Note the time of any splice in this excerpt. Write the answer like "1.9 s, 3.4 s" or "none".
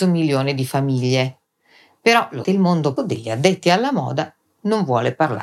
2.4 s, 3.0 s